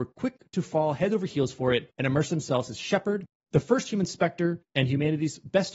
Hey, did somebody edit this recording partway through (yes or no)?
yes